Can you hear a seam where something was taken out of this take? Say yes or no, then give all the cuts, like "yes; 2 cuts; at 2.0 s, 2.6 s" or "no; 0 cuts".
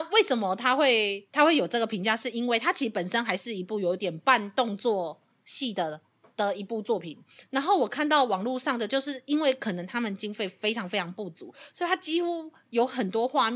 no; 0 cuts